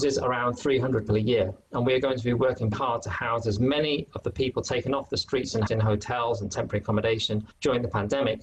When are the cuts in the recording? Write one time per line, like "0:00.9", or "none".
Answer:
0:01.1
0:02.7
0:05.7
0:07.5